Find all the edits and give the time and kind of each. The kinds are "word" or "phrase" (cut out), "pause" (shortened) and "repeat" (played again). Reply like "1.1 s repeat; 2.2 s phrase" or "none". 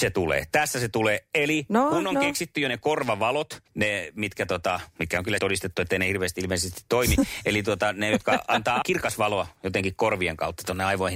3.7 s pause; 5.4 s word